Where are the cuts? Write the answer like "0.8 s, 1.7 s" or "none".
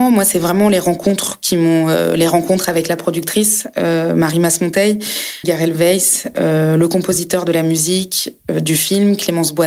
5.4 s

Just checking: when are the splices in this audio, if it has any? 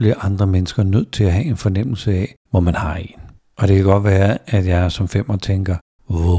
2.4 s, 3.4 s

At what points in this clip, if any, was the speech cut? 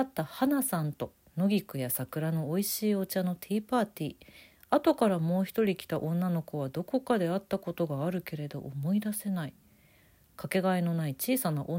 none

